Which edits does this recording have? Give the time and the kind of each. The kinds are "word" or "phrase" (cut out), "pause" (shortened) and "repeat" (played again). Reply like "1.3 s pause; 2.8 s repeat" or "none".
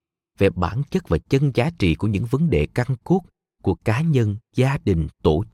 none